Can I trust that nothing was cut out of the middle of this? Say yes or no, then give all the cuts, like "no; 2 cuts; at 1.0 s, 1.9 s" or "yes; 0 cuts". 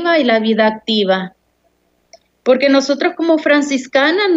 yes; 0 cuts